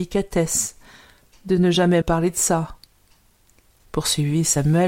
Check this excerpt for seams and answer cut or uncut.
cut